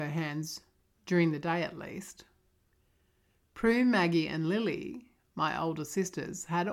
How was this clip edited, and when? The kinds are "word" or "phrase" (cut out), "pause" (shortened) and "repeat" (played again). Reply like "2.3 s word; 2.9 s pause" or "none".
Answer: none